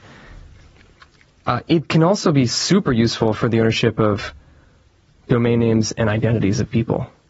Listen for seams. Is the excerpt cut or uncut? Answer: uncut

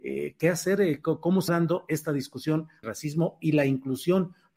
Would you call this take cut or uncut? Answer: cut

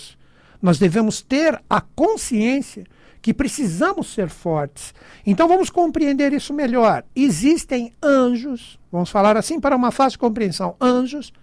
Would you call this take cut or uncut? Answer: cut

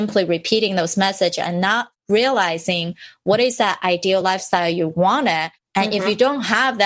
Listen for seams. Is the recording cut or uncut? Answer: uncut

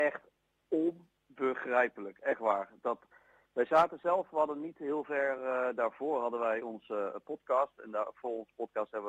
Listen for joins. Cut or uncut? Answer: uncut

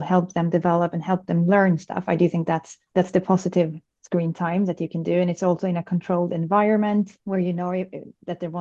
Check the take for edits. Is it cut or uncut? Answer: uncut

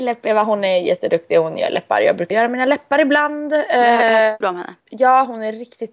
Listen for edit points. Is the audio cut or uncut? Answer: cut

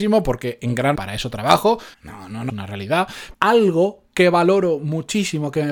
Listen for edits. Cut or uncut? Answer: cut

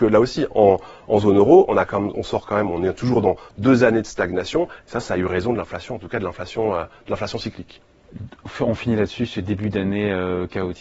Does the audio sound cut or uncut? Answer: uncut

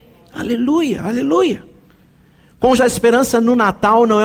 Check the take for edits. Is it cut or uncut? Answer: cut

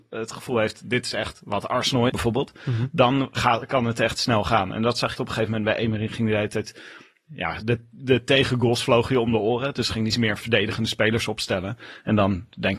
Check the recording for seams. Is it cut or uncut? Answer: cut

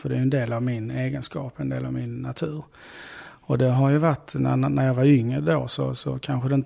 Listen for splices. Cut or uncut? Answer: uncut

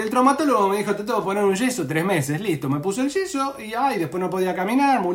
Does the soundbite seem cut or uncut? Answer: uncut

